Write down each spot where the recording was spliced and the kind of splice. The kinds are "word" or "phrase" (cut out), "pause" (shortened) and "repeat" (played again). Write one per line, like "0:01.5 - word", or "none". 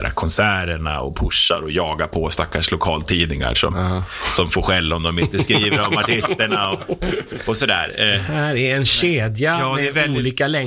none